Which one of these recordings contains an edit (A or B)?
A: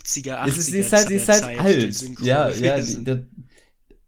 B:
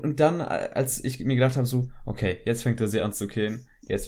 A